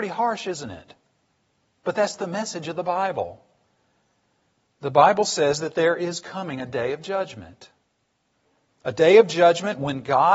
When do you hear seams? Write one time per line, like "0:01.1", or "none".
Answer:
none